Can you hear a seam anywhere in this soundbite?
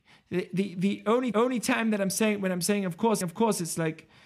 yes; 2 cuts; at 1.3 s, 3.2 s

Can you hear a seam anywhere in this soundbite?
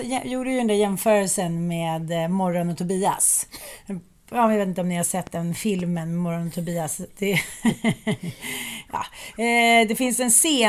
no; 0 cuts

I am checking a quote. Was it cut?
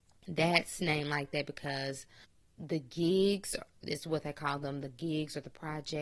no; 0 cuts

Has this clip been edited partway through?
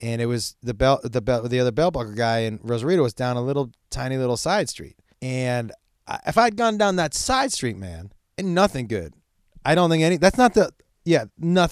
yes; 2 cuts; at 5.1 s, 8.2 s

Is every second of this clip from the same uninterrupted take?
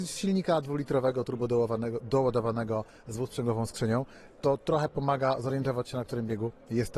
yes; 0 cuts

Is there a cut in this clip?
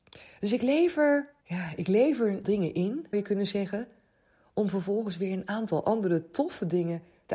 yes; 3 cuts; at 1.4 s, 2.4 s, 3.1 s

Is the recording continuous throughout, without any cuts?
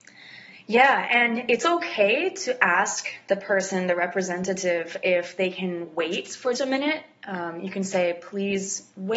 no; 1 cut; at 6.5 s

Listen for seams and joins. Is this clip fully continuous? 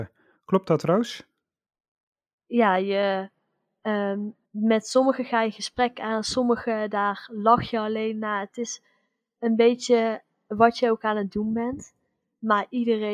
no; 1 cut; at 4.4 s

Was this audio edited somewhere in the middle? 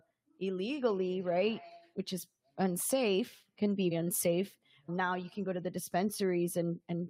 yes; 2 cuts; at 3.9 s, 4.9 s

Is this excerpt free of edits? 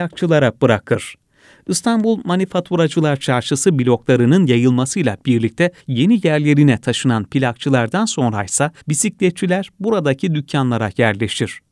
no; 2 cuts; at 5.8 s, 8.8 s

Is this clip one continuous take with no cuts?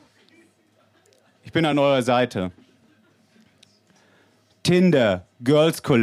yes; 0 cuts

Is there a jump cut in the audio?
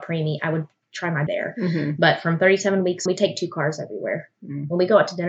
yes; 2 cuts; at 1.3 s, 3.1 s

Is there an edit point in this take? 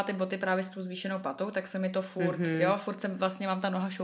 no; 0 cuts

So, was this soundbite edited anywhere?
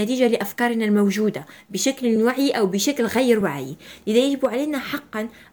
no; 0 cuts

